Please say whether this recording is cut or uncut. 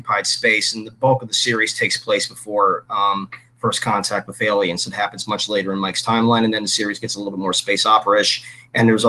uncut